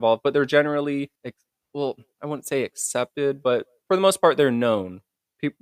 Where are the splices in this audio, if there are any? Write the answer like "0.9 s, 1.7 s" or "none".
1.2 s